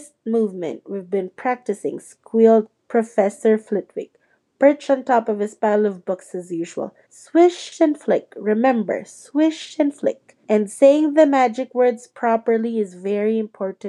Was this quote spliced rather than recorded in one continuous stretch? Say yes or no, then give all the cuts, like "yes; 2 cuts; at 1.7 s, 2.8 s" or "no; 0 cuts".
yes; 3 cuts; at 2.8 s, 7.0 s, 10.4 s